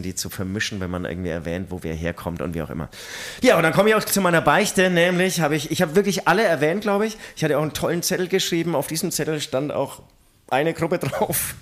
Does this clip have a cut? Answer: no; 0 cuts

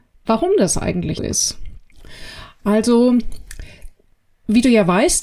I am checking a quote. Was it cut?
yes; 1 cut; at 1.2 s

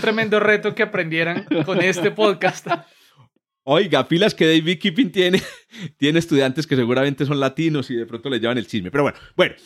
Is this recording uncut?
yes; 0 cuts

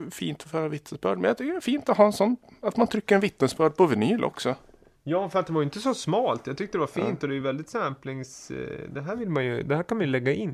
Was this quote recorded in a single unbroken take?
yes; 0 cuts

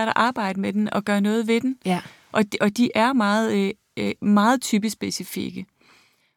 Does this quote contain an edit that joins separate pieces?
no; 0 cuts

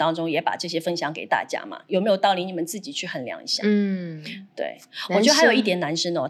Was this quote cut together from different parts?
no; 0 cuts

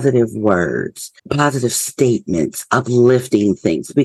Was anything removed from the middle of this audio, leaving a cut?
yes; 1 cut; at 1.2 s

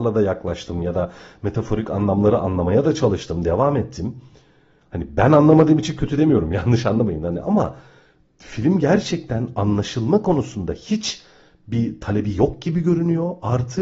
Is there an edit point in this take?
no; 0 cuts

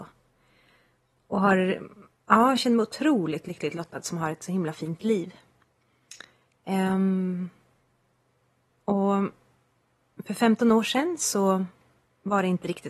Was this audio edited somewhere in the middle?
no; 0 cuts

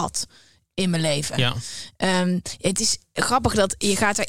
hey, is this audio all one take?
yes; 0 cuts

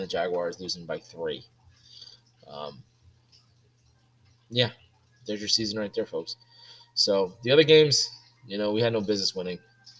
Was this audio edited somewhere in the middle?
no; 0 cuts

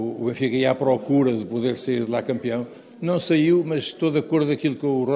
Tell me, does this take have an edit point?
no; 0 cuts

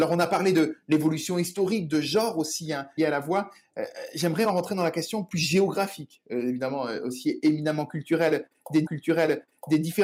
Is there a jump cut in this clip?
yes; 3 cuts; at 3.0 s, 4.4 s, 8.9 s

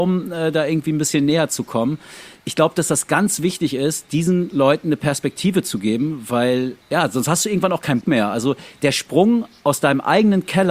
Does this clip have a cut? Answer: yes; 2 cuts; at 6.8 s, 8.0 s

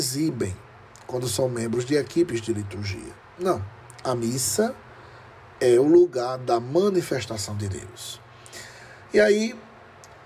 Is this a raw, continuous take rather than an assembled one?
yes; 0 cuts

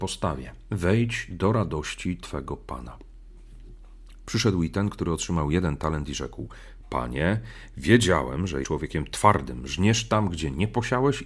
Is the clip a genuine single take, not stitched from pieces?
no; 1 cut; at 8.6 s

